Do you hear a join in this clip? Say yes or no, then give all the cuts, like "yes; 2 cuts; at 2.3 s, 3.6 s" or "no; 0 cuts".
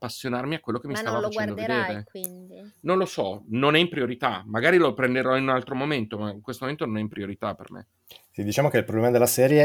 no; 0 cuts